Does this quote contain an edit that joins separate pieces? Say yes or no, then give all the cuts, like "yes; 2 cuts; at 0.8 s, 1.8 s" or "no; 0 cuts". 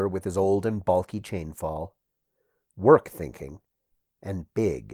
no; 0 cuts